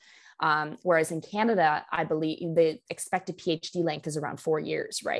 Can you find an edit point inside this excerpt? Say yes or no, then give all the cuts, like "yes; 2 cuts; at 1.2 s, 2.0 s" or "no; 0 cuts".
no; 0 cuts